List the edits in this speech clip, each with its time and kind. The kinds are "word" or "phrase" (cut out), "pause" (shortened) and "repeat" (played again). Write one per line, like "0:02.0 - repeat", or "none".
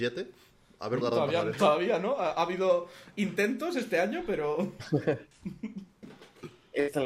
0:01.0 - word